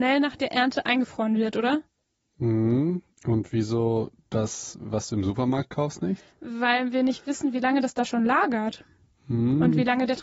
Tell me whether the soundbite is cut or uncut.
uncut